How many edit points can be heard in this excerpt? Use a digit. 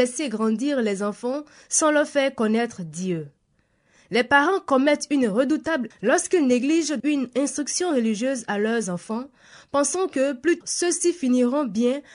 3